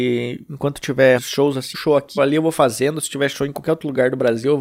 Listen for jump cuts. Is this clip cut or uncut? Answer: cut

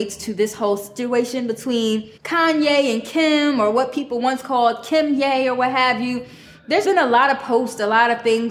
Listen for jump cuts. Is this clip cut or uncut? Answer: cut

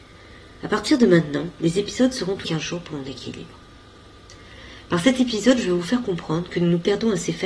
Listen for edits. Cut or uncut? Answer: cut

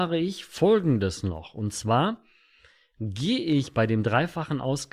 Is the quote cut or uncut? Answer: uncut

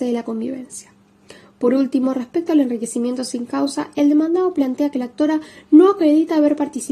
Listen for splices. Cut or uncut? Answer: uncut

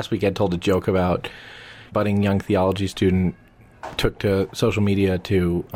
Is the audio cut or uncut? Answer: cut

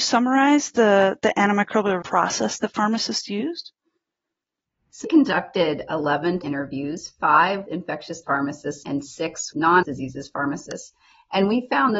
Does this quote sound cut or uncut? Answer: cut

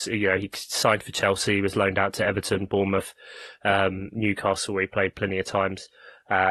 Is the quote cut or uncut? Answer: uncut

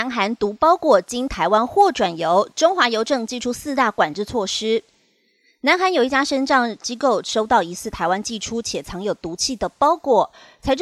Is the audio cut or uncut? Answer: uncut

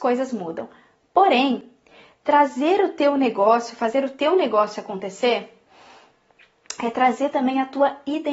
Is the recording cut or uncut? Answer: uncut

